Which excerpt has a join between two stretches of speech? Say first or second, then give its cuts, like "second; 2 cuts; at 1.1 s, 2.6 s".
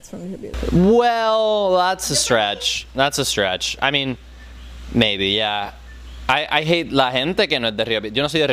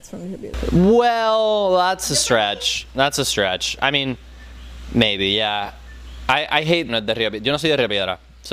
second; 1 cut; at 6.9 s